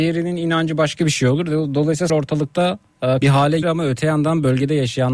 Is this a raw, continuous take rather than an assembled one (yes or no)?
no